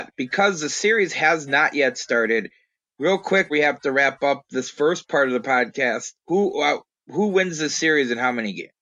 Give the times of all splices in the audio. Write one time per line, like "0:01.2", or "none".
0:03.5
0:06.2